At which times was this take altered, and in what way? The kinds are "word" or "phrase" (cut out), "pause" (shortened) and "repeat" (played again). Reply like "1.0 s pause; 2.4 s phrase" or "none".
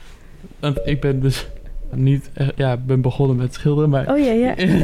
1.9 s word

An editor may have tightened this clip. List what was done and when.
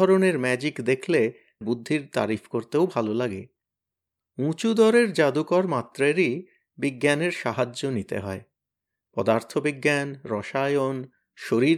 1.6 s word

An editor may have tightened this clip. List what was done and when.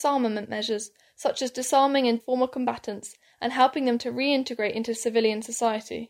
2.2 s word

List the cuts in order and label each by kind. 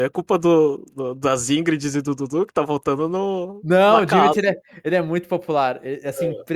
none

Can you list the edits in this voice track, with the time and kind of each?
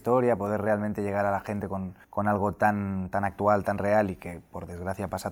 2.0 s pause

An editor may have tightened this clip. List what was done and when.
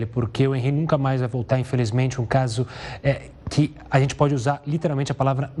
none

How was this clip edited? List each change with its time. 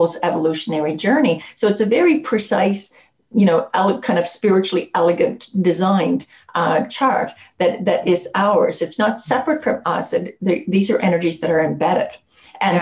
none

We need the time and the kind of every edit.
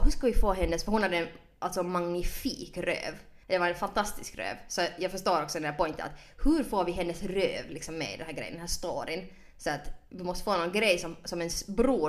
3.4 s pause

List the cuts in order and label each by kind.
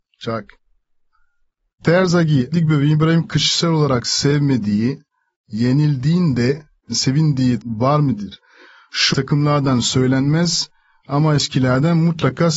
2.5 s word; 3.2 s word; 7.6 s word; 9.1 s word

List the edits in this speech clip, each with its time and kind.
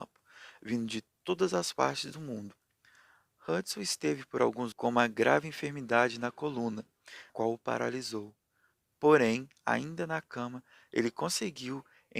4.7 s word; 7.3 s word

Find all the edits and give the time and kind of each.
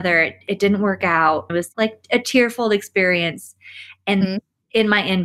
1.5 s word; 4.2 s word

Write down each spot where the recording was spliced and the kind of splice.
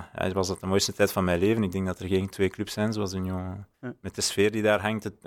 3.7 s pause

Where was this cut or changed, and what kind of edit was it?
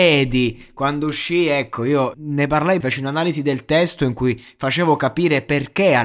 2.1 s word; 2.8 s word

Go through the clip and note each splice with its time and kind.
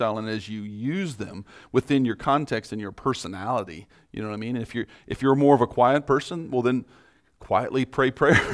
none

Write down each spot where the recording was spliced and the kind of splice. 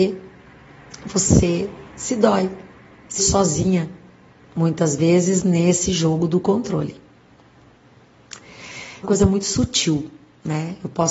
1.9 s pause; 3.2 s word; 9.0 s phrase

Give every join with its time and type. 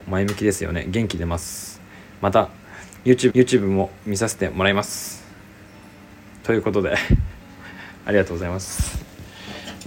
3.3 s repeat

